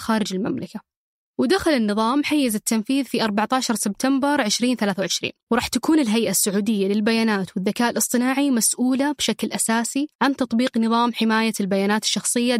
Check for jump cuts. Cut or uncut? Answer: cut